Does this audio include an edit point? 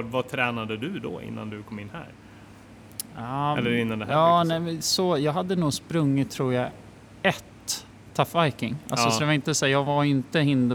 no; 0 cuts

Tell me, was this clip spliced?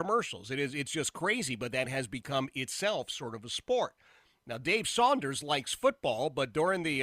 no; 0 cuts

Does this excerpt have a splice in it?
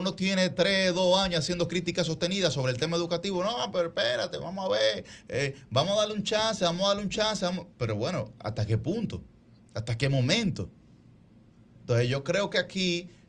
yes; 1 cut; at 9.6 s

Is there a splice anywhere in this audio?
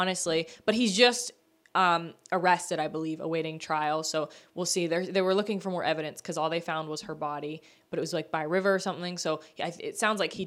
no; 0 cuts

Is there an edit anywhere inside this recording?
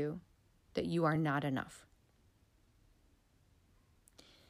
no; 0 cuts

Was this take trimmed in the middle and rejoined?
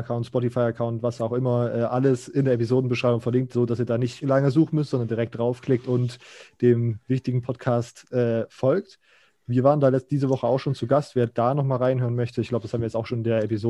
no; 0 cuts

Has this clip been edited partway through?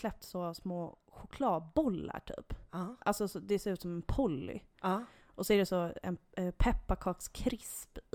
no; 0 cuts

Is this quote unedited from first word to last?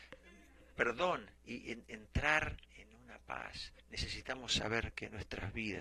no; 3 cuts; at 1.4 s, 2.6 s, 3.8 s

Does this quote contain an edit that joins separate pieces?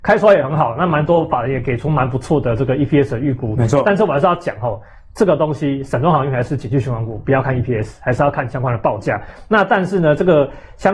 no; 0 cuts

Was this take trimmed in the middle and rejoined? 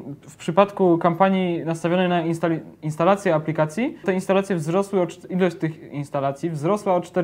yes; 1 cut; at 4.0 s

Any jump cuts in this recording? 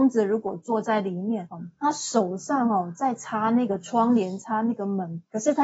no; 0 cuts

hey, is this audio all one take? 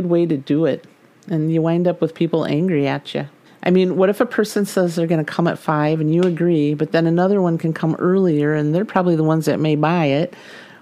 no; 1 cut; at 3.4 s

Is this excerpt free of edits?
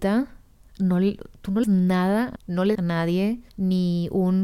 no; 4 cuts; at 1.6 s, 2.4 s, 2.7 s, 3.5 s

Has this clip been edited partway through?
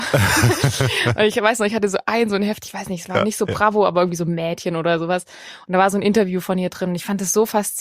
no; 0 cuts

